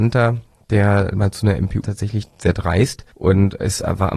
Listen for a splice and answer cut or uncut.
cut